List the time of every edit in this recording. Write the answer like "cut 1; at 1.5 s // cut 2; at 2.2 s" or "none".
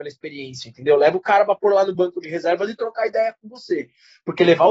none